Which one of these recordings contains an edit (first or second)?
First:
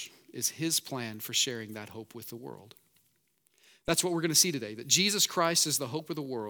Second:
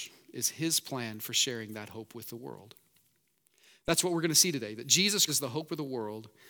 second